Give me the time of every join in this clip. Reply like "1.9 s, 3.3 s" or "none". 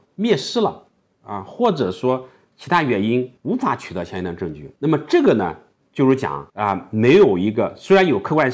3.4 s, 4.8 s, 6.5 s